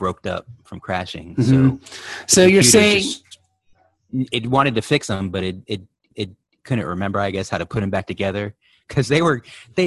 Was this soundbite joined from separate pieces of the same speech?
yes; 1 cut; at 6.1 s

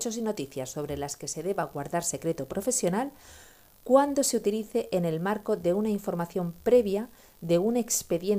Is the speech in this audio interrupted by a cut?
no; 0 cuts

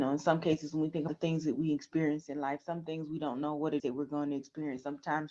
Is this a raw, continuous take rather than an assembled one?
no; 2 cuts; at 1.1 s, 3.8 s

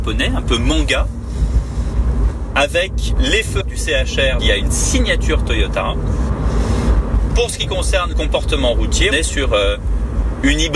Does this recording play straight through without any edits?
no; 5 cuts; at 3.2 s, 3.6 s, 4.4 s, 8.1 s, 9.1 s

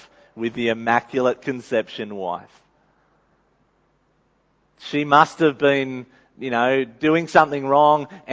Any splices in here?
no; 0 cuts

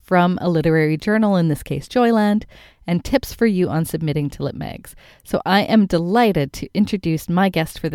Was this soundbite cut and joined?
no; 0 cuts

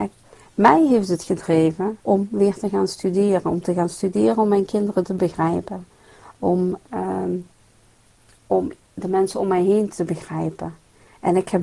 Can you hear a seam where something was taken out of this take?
yes; 1 cut; at 2.0 s

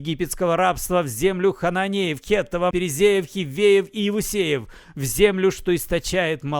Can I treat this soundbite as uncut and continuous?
no; 1 cut; at 2.7 s

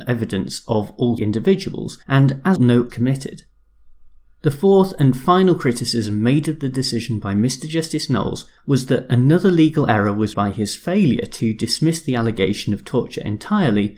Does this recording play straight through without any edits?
no; 6 cuts; at 1.2 s, 2.0 s, 2.6 s, 2.9 s, 8.6 s, 10.3 s

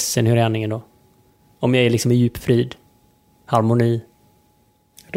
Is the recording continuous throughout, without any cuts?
yes; 0 cuts

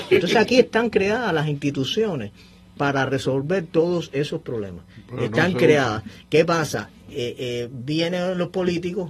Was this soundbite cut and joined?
no; 0 cuts

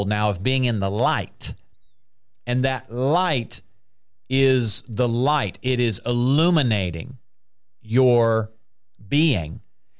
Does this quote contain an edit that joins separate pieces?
no; 0 cuts

